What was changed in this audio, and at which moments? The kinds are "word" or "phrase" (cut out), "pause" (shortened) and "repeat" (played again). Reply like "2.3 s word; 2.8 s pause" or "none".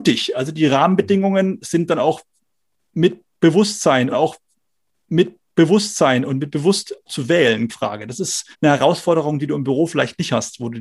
4.1 s repeat; 7.1 s word; 7.7 s word; 8.5 s pause